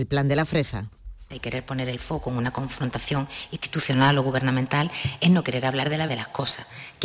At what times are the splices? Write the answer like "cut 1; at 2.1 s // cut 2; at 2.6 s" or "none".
cut 1; at 6.1 s